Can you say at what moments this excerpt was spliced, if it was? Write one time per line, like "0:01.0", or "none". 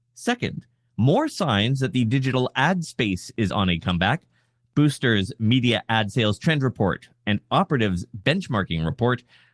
none